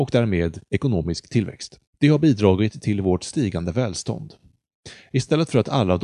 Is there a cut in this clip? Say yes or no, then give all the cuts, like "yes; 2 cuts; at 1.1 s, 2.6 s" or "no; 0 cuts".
yes; 1 cut; at 1.9 s